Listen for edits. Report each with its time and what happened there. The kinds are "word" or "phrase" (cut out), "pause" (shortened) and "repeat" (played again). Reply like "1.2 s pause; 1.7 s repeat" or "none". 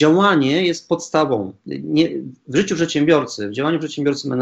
none